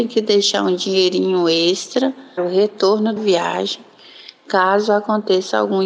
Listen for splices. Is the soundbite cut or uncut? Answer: cut